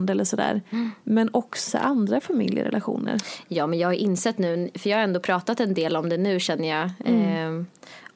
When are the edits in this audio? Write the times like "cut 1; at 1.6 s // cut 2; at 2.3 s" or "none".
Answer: cut 1; at 1.7 s